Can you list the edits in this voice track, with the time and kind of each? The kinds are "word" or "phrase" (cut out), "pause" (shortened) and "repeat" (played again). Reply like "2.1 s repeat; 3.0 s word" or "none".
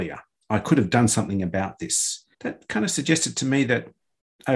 2.3 s pause